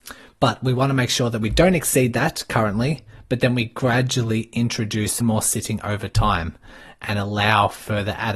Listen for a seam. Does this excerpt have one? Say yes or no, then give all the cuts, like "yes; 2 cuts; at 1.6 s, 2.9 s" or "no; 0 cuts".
yes; 1 cut; at 5.2 s